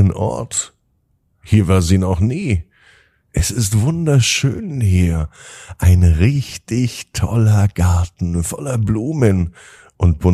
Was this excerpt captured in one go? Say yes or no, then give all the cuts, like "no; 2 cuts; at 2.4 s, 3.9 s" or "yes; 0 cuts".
yes; 0 cuts